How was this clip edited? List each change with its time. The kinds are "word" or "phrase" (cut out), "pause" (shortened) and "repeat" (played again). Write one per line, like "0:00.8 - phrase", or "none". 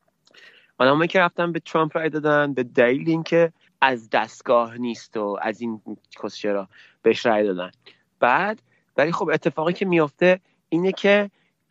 0:03.7 - pause